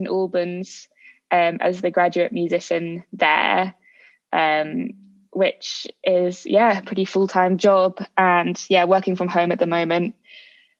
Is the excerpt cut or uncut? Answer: uncut